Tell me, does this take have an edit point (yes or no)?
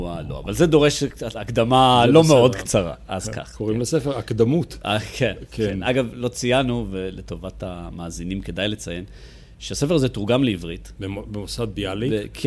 no